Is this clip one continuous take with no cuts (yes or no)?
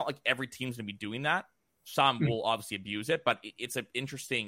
yes